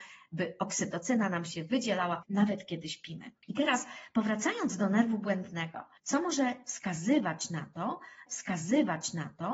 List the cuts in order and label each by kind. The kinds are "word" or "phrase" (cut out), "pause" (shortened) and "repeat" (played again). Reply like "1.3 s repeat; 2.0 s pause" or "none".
2.2 s word; 8.3 s repeat

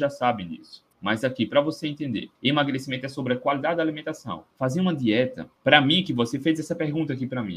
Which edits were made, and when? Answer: 0.9 s pause; 2.3 s pause; 4.5 s pause; 5.6 s pause

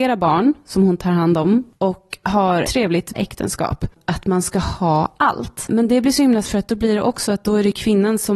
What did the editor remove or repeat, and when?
2.6 s word; 3.1 s word; 6.4 s word

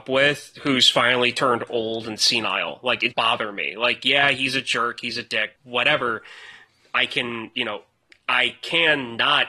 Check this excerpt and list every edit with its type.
3.1 s word; 5.6 s pause; 8.1 s word

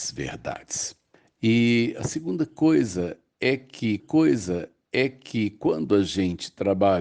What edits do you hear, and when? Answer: 1.1 s pause; 4.0 s repeat

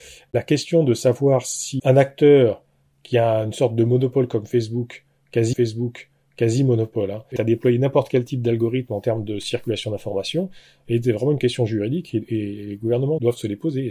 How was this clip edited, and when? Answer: 1.8 s word; 5.5 s repeat; 7.4 s phrase

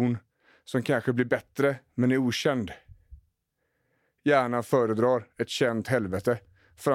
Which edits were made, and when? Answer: none

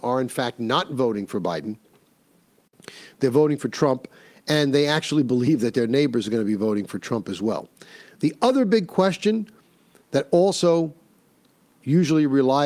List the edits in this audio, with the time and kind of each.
none

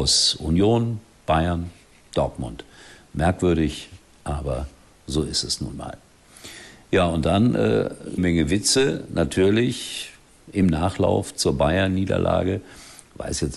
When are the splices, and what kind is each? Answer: 8.2 s phrase

